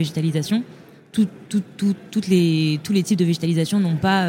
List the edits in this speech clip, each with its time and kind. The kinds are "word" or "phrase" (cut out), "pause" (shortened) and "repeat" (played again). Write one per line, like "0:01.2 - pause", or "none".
none